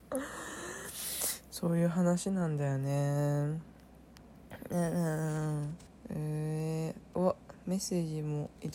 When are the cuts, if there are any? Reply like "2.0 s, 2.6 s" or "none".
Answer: 6.0 s